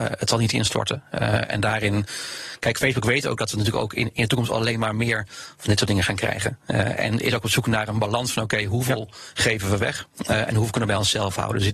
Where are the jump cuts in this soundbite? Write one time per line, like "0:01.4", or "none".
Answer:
none